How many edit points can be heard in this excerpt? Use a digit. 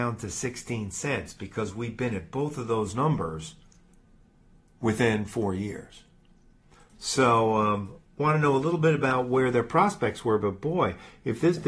0